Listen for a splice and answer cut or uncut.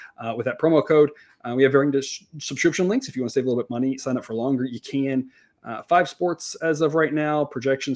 uncut